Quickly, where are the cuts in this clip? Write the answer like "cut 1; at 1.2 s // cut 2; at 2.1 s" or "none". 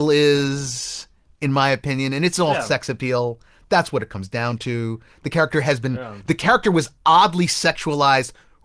none